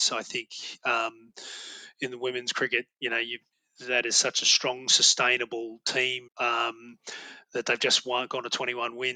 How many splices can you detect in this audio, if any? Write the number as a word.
two